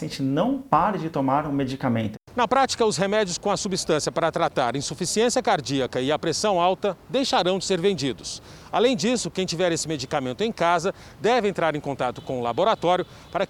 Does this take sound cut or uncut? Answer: uncut